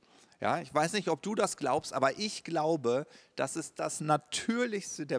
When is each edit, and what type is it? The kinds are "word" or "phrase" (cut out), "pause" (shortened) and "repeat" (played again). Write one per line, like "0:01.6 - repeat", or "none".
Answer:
none